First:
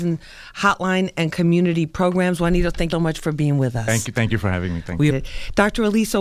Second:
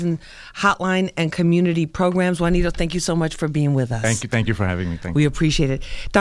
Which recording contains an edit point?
first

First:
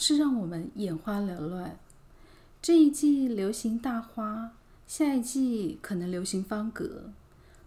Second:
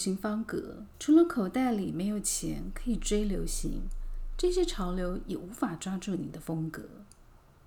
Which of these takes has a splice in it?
second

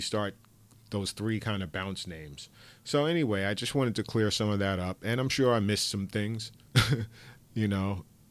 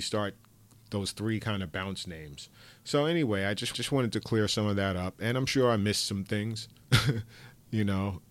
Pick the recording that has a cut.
second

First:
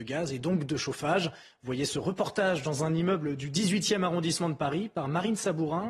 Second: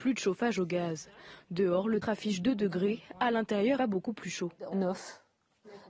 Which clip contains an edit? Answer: second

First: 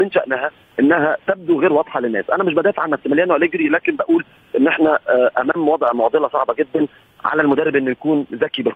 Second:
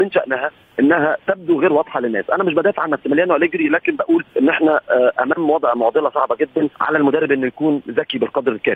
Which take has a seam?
second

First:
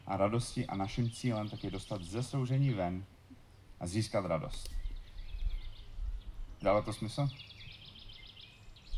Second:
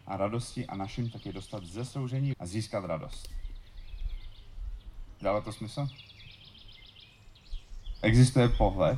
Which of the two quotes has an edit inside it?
second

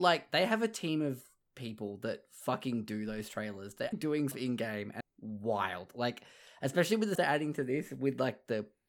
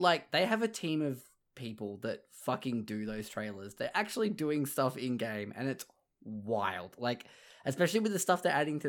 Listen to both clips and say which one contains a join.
first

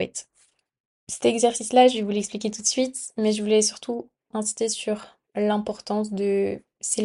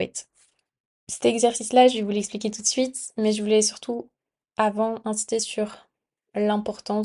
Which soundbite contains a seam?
first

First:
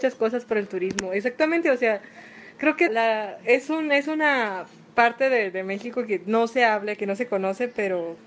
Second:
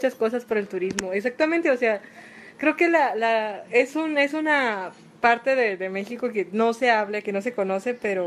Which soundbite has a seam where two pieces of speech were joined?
first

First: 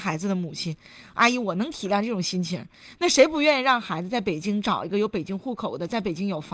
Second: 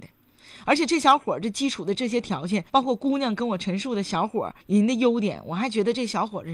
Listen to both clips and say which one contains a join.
second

